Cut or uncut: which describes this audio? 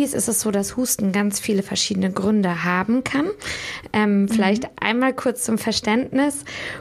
uncut